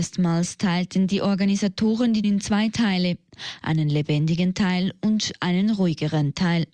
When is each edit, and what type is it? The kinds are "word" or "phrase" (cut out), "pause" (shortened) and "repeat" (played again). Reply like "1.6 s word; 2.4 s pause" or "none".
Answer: 2.2 s word